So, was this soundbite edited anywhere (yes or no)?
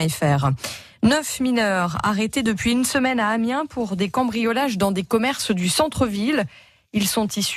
no